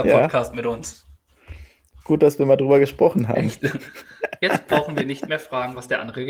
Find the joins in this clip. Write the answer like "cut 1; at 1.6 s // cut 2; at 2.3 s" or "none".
none